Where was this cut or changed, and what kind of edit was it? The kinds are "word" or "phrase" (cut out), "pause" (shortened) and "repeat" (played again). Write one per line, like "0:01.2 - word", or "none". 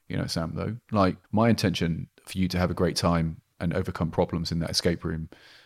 0:01.2 - pause
0:02.1 - pause